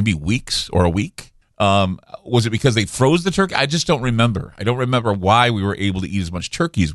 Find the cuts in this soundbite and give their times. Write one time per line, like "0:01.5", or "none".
0:01.4